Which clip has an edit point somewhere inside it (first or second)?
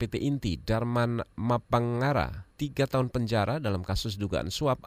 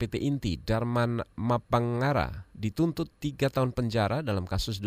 first